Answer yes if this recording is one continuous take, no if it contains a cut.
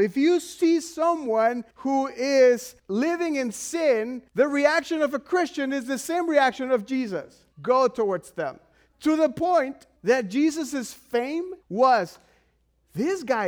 no